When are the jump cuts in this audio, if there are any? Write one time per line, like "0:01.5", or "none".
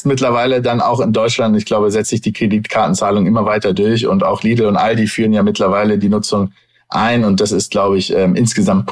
none